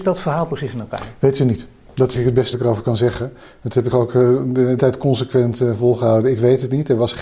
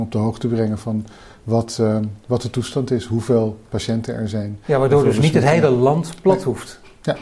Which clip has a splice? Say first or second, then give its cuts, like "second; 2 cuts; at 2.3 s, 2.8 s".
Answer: first; 4 cuts; at 2.1 s, 2.5 s, 3.9 s, 4.8 s